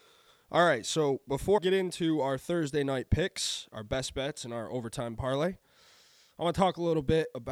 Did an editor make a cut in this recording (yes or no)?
yes